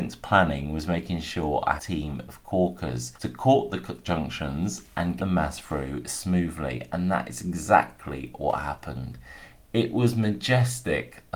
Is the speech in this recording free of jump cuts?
no; 3 cuts; at 1.8 s, 3.2 s, 5.2 s

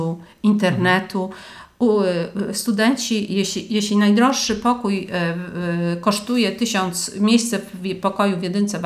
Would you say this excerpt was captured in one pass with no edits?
yes; 0 cuts

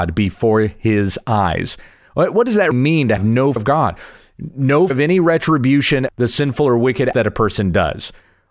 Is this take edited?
yes; 6 cuts; at 2.7 s, 3.2 s, 3.6 s, 4.9 s, 6.1 s, 7.1 s

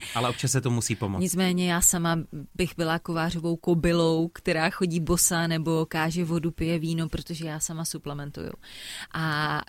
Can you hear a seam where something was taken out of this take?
no; 0 cuts

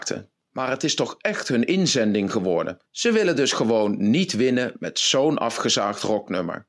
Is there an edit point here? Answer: yes; 1 cut; at 2.9 s

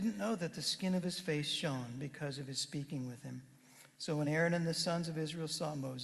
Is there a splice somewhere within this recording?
no; 0 cuts

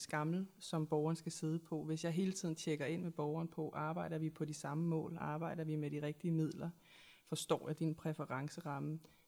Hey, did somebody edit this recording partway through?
no; 0 cuts

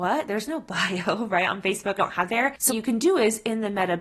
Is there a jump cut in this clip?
yes; 3 cuts; at 2.0 s, 2.3 s, 2.7 s

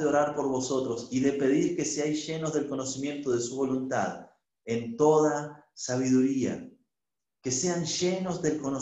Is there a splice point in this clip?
no; 0 cuts

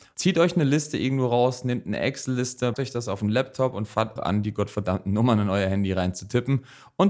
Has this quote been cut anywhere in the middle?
yes; 2 cuts; at 2.7 s, 4.2 s

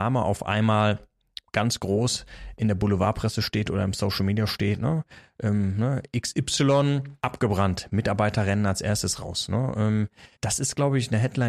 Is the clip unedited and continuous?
no; 3 cuts; at 1.5 s, 7.2 s, 10.3 s

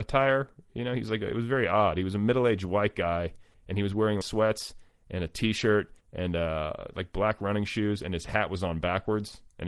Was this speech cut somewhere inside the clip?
yes; 3 cuts; at 3.5 s, 4.2 s, 6.0 s

